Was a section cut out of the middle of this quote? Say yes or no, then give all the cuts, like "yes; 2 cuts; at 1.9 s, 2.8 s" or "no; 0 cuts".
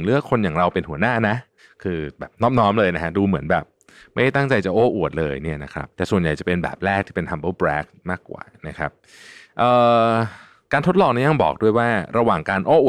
yes; 1 cut; at 5.9 s